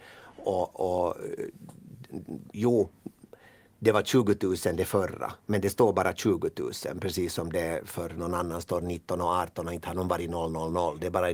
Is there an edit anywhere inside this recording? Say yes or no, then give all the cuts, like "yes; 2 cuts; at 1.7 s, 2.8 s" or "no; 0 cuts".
no; 0 cuts